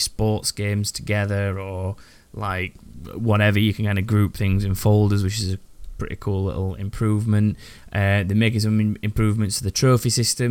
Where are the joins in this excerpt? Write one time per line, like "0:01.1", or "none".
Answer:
none